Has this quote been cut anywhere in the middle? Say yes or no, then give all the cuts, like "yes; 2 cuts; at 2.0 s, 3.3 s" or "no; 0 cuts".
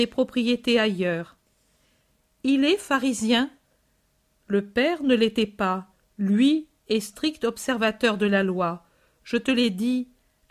no; 0 cuts